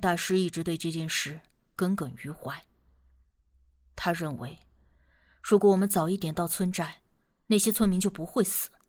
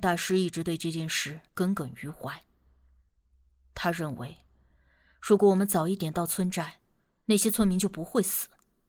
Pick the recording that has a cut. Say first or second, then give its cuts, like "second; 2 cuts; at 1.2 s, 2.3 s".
second; 1 cut; at 1.5 s